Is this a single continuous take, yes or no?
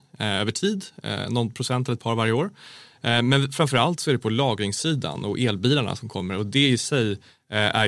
yes